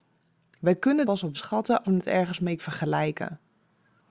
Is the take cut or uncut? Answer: cut